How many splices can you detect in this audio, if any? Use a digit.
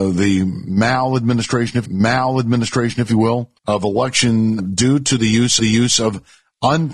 4